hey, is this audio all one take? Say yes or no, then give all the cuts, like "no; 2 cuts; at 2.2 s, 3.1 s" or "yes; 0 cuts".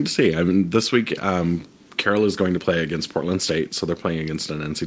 yes; 0 cuts